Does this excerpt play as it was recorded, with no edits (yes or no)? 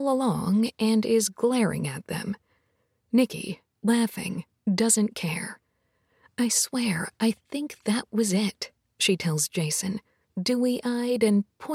yes